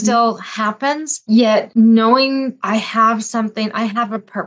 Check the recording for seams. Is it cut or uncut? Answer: cut